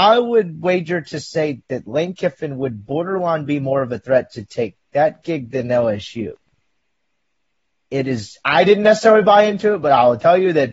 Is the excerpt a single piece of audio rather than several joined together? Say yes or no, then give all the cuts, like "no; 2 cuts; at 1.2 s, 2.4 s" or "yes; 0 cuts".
yes; 0 cuts